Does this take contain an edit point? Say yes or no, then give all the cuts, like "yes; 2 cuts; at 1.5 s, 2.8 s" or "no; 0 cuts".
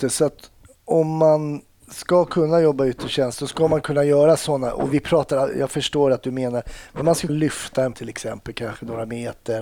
yes; 2 cuts; at 7.3 s, 7.9 s